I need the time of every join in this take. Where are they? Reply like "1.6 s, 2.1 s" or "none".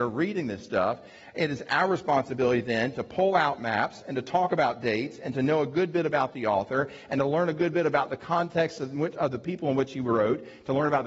none